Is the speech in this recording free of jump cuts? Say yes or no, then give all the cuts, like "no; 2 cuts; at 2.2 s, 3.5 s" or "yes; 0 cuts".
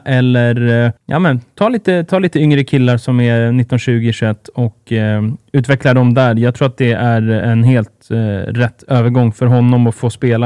no; 1 cut; at 1.0 s